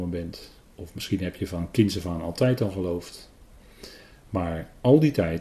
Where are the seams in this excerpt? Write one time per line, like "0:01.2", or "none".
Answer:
none

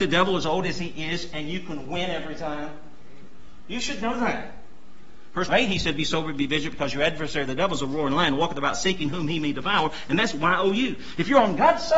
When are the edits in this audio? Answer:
0:05.5

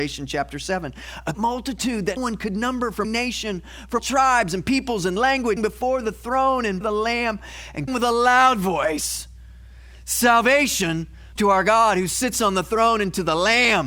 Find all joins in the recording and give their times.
0:01.3
0:02.2
0:03.0
0:04.0
0:05.6
0:06.8
0:07.9
0:11.4

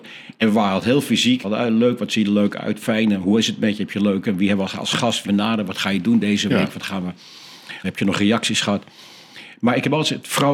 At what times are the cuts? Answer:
0:01.4
0:05.3
0:07.8

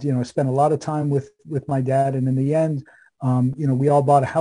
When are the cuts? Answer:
none

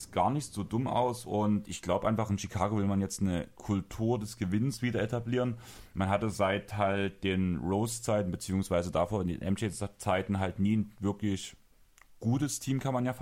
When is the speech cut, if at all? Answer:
none

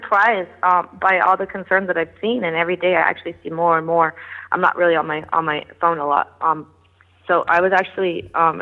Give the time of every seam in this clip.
none

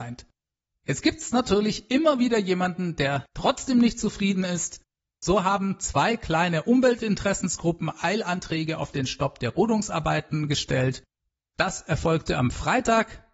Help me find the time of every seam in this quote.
none

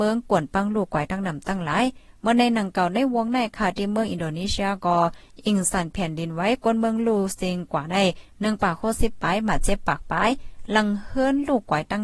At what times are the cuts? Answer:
none

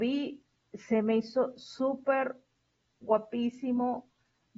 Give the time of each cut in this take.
none

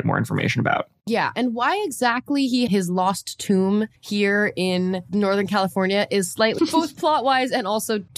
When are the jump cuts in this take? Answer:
0:02.7
0:04.0
0:06.6

